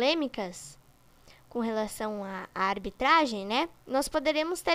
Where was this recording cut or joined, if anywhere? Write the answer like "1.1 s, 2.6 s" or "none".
none